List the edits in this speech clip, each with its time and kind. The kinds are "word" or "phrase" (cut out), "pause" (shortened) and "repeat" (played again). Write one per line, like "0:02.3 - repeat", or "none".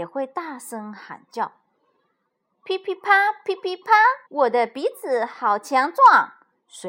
0:04.3 - pause

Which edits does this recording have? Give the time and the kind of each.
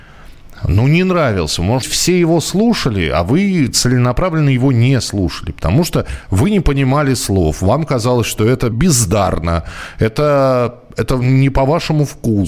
0:01.8 - word
0:08.7 - word

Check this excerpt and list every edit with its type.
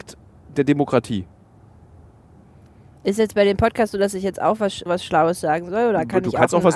0:04.9 - word

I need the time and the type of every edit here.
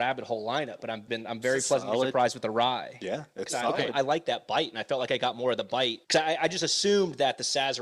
0:01.1 - word
0:06.0 - pause

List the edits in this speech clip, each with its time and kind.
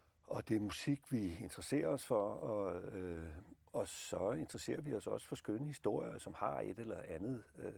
none

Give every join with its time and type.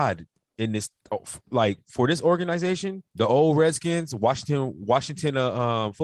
0:03.1 - pause

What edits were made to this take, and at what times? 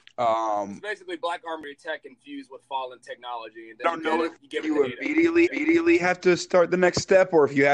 0:03.8 - phrase
0:05.5 - repeat

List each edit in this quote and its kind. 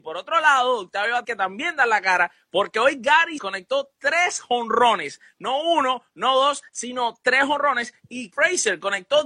0:01.2 - word
0:03.4 - word
0:08.3 - word

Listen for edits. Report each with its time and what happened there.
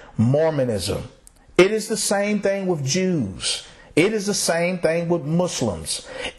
none

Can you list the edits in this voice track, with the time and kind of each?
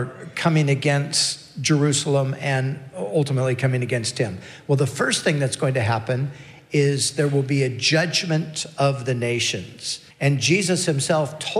0:10.1 - pause

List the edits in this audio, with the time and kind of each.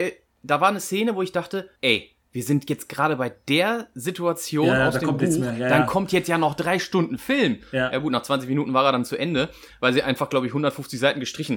0:01.8 - pause

